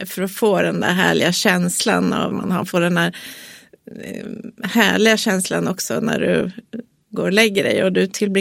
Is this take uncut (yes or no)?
no